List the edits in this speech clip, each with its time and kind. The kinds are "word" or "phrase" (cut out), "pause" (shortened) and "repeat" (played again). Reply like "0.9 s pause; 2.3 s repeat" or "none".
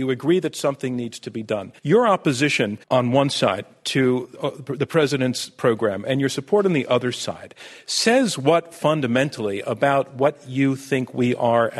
1.8 s pause; 2.8 s pause